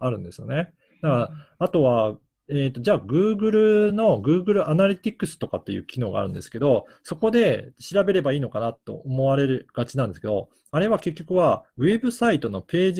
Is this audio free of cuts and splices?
yes; 0 cuts

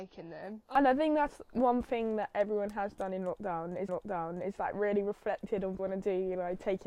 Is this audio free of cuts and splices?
no; 2 cuts; at 3.9 s, 5.8 s

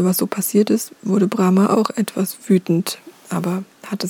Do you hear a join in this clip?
no; 0 cuts

